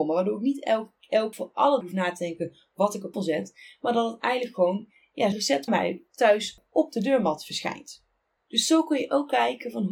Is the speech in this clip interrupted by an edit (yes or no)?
yes